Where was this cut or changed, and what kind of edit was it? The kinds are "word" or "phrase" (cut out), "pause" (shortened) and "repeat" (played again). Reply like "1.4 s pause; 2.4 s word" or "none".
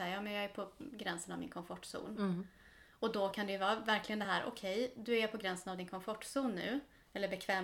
none